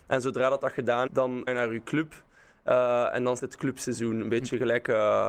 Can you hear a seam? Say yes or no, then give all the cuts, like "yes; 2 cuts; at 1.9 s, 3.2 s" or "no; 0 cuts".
yes; 3 cuts; at 1.1 s, 1.5 s, 3.4 s